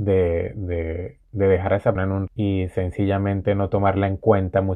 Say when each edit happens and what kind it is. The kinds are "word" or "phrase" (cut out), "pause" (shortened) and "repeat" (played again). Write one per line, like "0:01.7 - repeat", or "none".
0:01.2 - pause
0:02.0 - word
0:02.3 - word